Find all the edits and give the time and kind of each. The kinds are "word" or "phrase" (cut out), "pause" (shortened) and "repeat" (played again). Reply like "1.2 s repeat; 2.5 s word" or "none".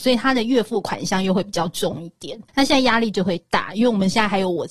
2.5 s pause